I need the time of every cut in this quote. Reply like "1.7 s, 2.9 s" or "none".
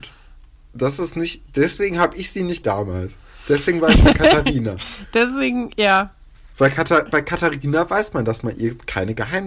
2.6 s, 6.5 s